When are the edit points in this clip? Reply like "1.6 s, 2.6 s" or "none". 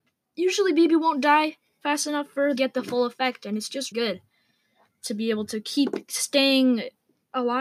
2.6 s, 3.9 s